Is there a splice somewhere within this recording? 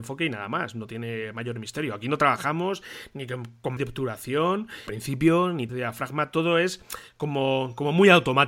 yes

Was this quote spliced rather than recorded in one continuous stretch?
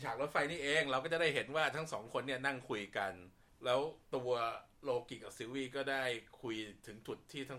yes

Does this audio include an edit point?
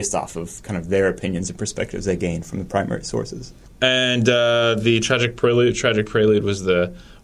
no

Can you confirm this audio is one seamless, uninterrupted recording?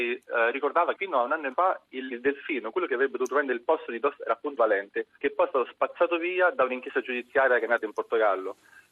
no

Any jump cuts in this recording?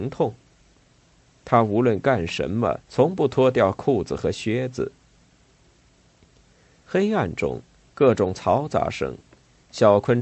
yes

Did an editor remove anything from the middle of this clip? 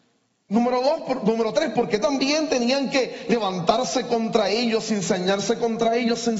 no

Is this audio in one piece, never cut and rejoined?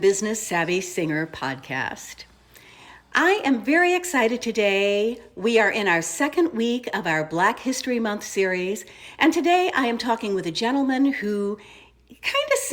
yes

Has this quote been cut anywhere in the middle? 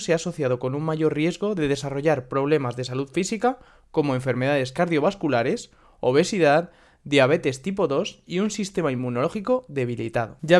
no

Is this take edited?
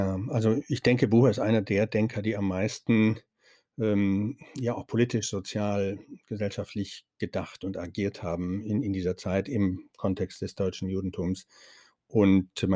no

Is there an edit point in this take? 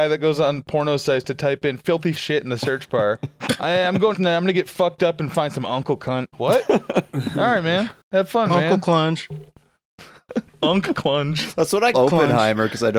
yes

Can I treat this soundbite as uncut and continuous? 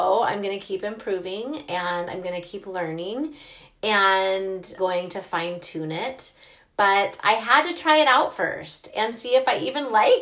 no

